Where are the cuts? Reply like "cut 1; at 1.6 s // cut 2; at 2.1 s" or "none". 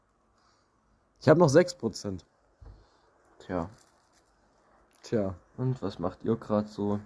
none